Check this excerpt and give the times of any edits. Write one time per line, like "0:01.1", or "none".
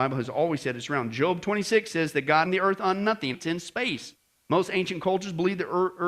0:02.5
0:03.3